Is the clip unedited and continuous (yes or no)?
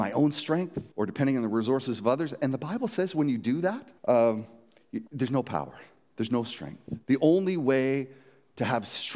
no